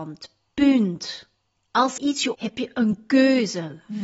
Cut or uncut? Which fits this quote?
cut